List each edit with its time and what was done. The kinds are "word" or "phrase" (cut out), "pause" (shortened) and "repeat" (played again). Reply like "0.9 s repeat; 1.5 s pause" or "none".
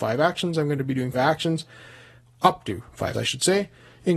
1.1 s word; 3.1 s word